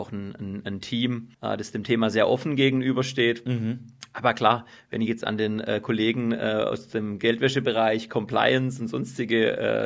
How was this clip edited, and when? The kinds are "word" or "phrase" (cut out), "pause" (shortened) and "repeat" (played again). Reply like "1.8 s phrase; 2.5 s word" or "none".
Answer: 1.3 s pause